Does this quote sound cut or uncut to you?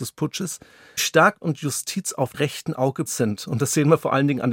cut